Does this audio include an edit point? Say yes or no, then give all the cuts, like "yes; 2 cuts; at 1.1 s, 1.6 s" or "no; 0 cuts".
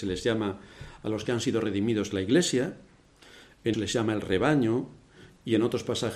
yes; 1 cut; at 3.7 s